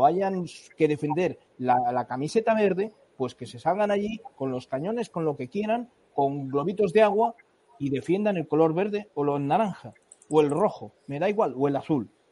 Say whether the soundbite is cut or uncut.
uncut